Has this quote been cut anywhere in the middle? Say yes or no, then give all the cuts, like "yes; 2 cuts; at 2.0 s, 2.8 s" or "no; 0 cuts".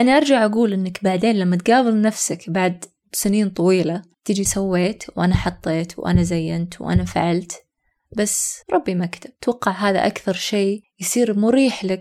yes; 3 cuts; at 4.5 s, 8.6 s, 9.4 s